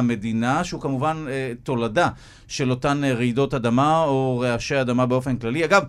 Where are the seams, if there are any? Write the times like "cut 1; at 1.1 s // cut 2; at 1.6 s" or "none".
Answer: none